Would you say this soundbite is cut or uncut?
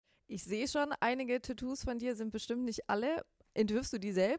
uncut